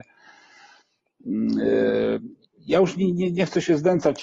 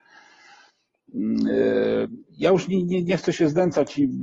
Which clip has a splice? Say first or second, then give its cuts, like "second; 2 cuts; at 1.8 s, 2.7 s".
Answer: second; 1 cut; at 2.3 s